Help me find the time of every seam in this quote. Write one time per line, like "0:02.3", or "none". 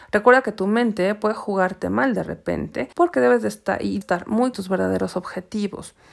0:02.9
0:04.0
0:04.5